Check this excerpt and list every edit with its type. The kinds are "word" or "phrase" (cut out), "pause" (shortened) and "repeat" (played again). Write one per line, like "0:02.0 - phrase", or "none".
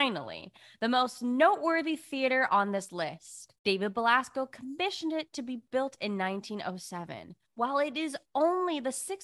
0:03.6 - pause
0:07.4 - pause